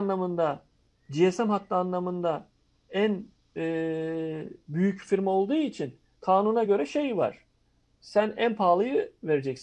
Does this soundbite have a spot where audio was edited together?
no; 0 cuts

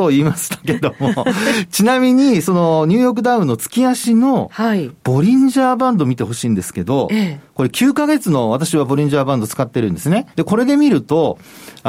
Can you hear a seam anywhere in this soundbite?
yes; 1 cut; at 10.3 s

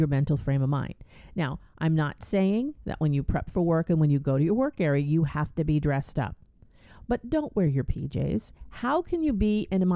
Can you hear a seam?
no; 0 cuts

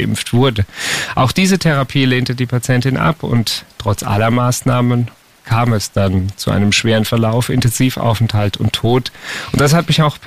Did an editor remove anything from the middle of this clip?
no; 0 cuts

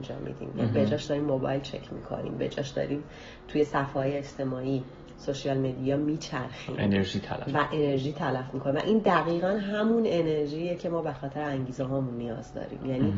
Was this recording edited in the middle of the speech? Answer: no; 0 cuts

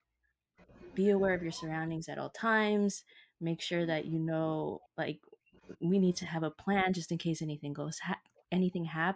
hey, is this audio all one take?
yes; 0 cuts

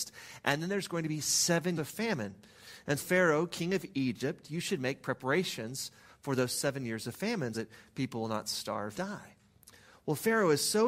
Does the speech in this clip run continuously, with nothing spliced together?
no; 4 cuts; at 1.8 s, 3.0 s, 7.5 s, 8.9 s

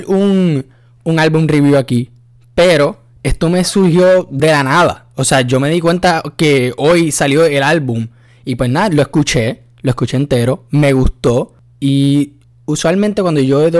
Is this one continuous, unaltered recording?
yes; 0 cuts

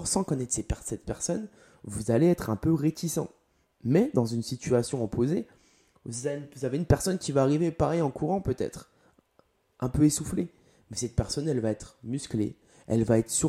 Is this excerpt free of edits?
yes; 0 cuts

